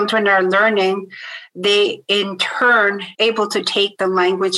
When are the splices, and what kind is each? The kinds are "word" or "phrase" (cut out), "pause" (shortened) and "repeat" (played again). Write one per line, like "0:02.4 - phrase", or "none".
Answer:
0:03.1 - pause